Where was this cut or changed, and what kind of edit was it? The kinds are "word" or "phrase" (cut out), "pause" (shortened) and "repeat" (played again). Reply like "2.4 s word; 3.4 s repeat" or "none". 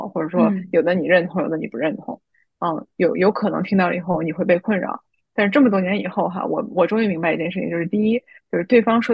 none